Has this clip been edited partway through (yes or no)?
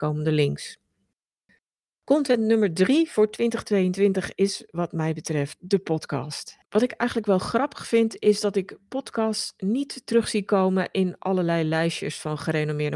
yes